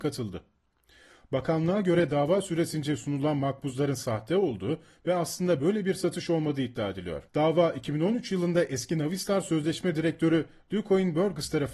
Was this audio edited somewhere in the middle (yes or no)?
yes